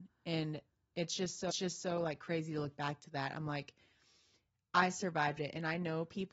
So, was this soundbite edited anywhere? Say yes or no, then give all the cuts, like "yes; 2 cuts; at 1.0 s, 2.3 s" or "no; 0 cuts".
yes; 1 cut; at 1.5 s